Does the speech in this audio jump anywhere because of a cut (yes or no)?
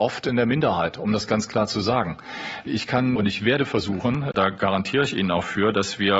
no